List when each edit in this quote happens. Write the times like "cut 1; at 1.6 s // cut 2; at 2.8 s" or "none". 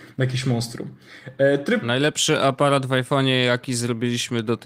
none